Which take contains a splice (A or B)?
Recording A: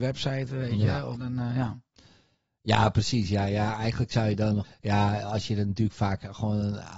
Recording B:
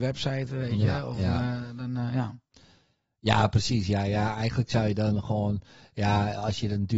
A